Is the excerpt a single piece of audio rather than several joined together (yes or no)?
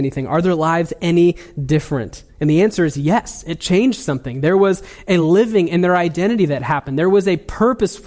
yes